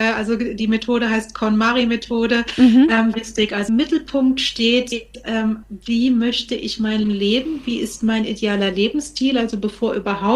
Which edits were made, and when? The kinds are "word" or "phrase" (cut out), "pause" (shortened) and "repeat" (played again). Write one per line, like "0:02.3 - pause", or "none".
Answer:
0:03.1 - word
0:03.7 - word
0:05.6 - word
0:07.0 - word